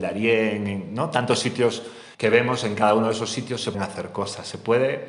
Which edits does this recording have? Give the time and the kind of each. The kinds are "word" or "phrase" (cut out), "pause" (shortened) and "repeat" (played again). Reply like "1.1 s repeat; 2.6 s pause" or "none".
2.1 s pause; 3.7 s word